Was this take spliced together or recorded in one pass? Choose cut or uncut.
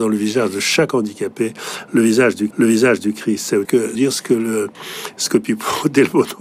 cut